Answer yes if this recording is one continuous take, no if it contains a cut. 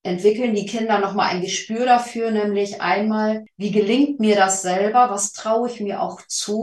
yes